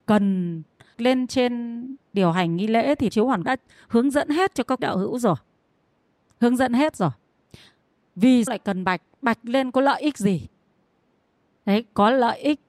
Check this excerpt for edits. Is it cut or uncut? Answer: cut